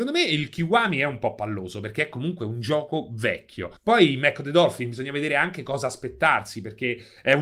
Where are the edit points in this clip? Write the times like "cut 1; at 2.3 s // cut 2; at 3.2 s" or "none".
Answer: cut 1; at 3.8 s